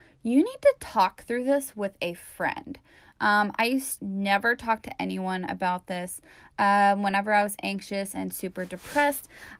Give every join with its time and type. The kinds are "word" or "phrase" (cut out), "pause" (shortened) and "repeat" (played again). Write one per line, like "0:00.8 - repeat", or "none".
0:04.0 - word